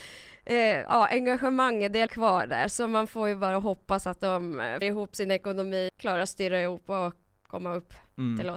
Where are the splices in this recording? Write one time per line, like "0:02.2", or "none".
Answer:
0:02.1
0:04.8
0:05.9

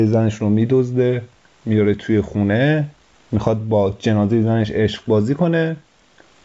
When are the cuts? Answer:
none

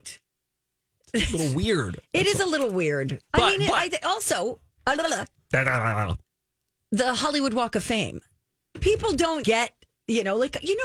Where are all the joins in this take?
0:09.4

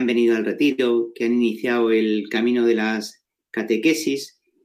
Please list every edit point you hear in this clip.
none

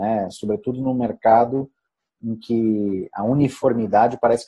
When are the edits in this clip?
none

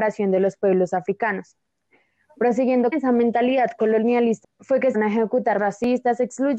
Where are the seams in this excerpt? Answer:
0:02.9
0:04.4
0:04.9
0:05.6

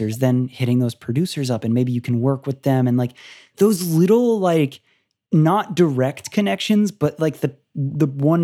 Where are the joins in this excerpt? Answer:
none

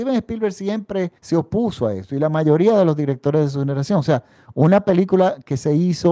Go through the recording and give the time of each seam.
0:01.2

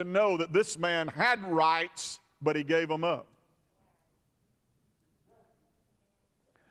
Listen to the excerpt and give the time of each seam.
none

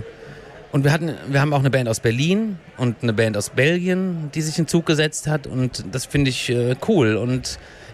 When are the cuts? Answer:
none

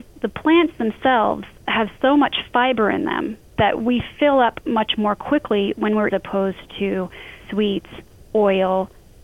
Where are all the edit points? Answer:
0:06.1
0:07.4

